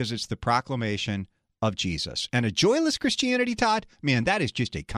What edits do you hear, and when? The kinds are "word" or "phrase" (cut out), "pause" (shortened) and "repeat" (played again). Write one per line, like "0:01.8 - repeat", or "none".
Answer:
none